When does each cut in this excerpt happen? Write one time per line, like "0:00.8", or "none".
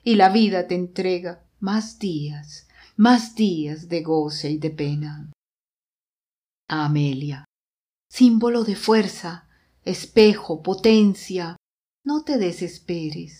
0:01.5